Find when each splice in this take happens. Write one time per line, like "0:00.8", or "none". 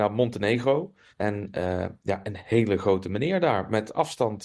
0:01.1

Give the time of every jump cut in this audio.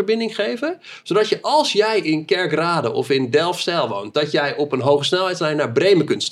none

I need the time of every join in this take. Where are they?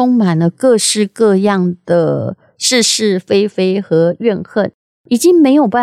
none

